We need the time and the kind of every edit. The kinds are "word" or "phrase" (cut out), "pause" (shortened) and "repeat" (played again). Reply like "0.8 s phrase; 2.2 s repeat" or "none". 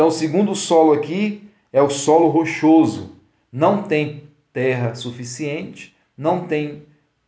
none